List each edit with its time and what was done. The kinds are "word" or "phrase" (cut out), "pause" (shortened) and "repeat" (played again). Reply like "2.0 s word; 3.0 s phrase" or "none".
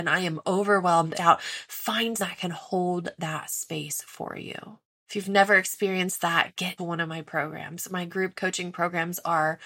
1.1 s phrase; 2.2 s word; 4.8 s pause; 6.8 s word